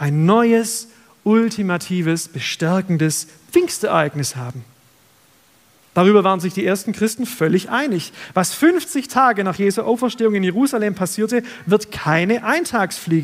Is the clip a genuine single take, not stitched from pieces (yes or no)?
yes